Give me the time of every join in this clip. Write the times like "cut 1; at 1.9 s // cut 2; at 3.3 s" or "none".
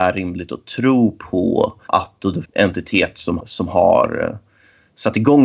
cut 1; at 1.9 s // cut 2; at 2.4 s // cut 3; at 3.4 s